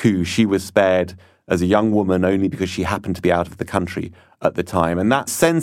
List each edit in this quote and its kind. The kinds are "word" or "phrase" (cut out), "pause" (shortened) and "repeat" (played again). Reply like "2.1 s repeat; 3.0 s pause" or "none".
none